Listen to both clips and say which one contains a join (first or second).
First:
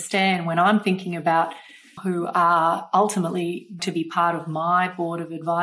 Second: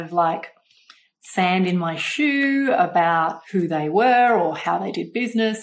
first